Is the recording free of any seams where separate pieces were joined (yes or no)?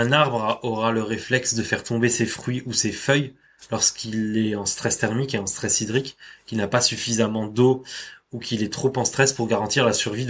yes